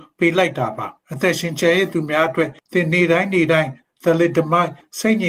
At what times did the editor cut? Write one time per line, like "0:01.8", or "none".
0:01.0
0:02.6